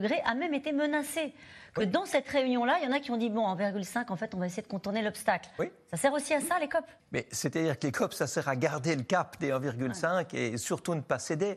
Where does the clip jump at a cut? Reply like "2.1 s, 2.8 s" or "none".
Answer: 7.0 s